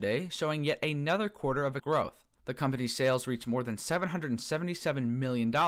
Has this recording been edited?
yes; 1 cut; at 1.8 s

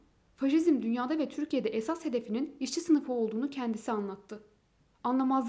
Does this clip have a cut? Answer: no; 0 cuts

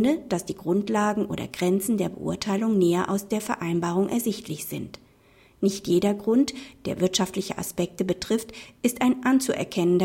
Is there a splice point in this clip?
no; 0 cuts

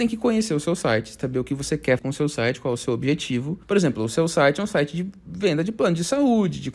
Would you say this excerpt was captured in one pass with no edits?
no; 3 cuts; at 1.2 s, 2.0 s, 3.6 s

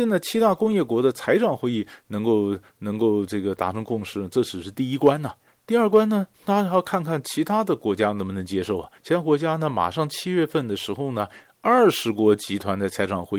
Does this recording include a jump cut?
yes; 3 cuts; at 5.5 s, 6.3 s, 9.0 s

